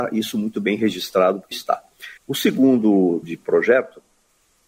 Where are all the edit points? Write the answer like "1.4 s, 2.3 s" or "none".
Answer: 1.5 s, 2.2 s, 3.2 s